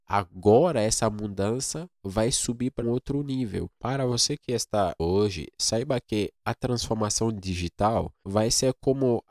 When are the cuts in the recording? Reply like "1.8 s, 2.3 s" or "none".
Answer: 2.8 s, 5.0 s, 6.4 s